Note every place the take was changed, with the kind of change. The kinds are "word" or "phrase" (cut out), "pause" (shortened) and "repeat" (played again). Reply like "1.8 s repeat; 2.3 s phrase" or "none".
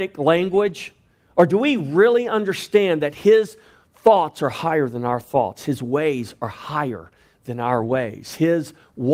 none

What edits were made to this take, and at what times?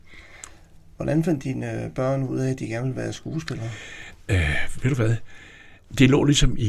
none

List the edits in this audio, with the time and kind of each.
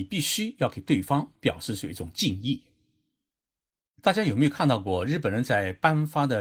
1.4 s pause

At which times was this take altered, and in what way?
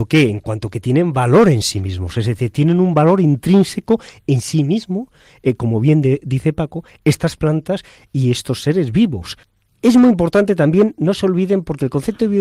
none

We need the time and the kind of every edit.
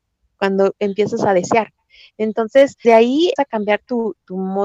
2.8 s word; 3.4 s word

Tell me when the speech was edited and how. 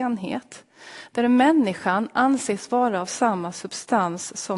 none

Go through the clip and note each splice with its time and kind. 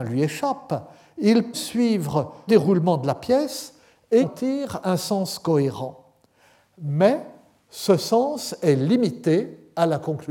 1.5 s word; 2.5 s word; 4.2 s word

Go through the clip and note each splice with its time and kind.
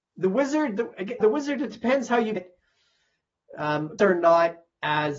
1.2 s word; 2.4 s word; 4.0 s word

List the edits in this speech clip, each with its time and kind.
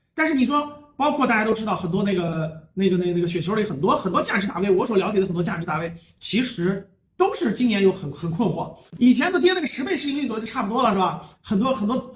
7.1 s pause

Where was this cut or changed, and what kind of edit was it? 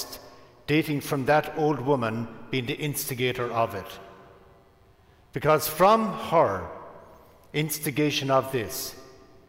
none

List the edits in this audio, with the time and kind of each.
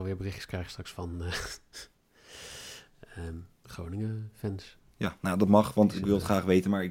3.5 s pause

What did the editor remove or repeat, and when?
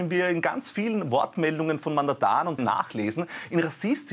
2.6 s word

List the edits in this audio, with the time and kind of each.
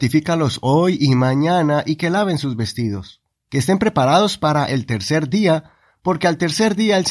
none

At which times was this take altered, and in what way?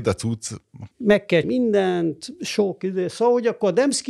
0.9 s pause; 1.4 s word

